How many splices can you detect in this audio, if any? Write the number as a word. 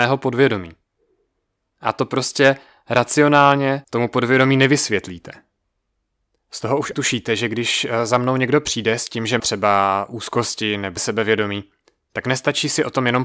four